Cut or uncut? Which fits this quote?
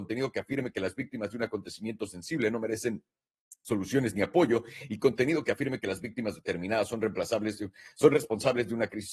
uncut